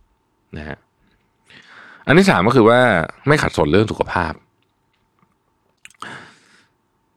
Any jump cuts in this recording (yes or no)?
no